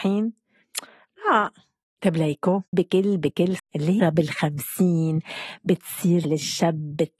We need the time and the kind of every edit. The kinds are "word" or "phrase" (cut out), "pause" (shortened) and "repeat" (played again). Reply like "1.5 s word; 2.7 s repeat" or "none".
1.8 s pause; 2.7 s word; 3.6 s word; 4.0 s word; 6.2 s word